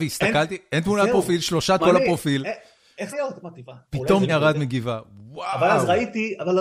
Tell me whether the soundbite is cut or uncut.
cut